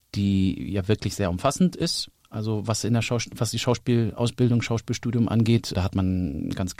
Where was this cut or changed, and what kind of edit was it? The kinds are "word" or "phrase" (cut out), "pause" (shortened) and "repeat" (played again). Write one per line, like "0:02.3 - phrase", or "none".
0:05.7 - word